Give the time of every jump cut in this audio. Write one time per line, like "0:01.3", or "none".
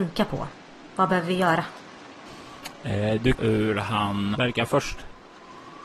0:03.3
0:04.3